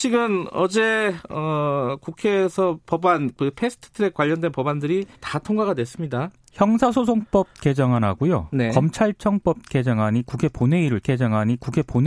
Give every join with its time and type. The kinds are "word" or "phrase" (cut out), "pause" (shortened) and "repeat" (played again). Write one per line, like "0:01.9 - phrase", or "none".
0:05.1 - pause
0:11.0 - repeat